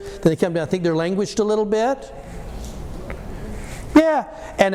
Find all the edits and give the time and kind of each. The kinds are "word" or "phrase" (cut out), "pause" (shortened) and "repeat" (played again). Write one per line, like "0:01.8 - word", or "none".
0:01.3 - word

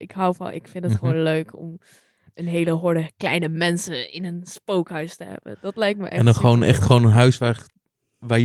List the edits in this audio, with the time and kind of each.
none

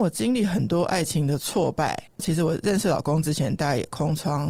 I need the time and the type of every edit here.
0:02.1 - pause

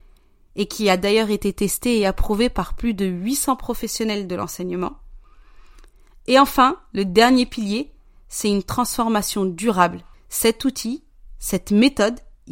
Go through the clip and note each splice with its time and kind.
0:10.1 - pause

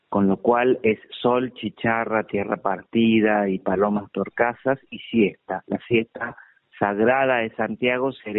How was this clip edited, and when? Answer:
none

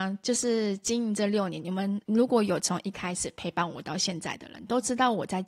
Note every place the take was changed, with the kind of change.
0:02.0 - pause

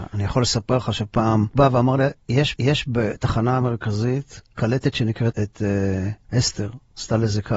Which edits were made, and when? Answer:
0:01.6 - word
0:02.6 - repeat
0:05.3 - phrase

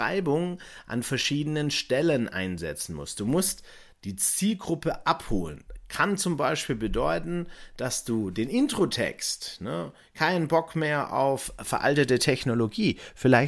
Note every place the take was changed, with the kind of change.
none

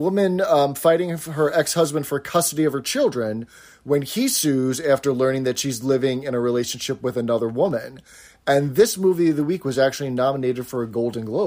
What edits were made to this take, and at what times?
none

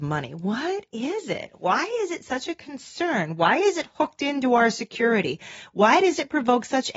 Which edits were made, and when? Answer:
none

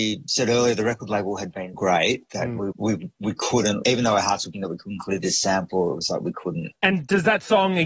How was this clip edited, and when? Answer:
0:01.7 - word
0:02.7 - word
0:03.8 - word
0:04.5 - word

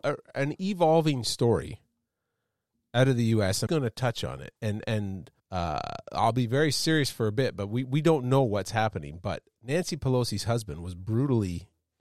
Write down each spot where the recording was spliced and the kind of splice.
0:03.7 - word
0:05.4 - pause

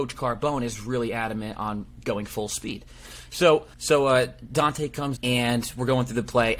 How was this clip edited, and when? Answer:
0:03.7 - pause
0:05.2 - word

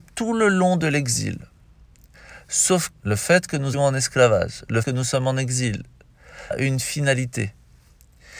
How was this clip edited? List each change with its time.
0:02.9 - word
0:03.7 - word
0:04.8 - word
0:06.5 - word

